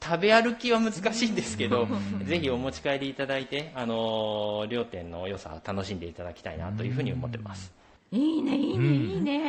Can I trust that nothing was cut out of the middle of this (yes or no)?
no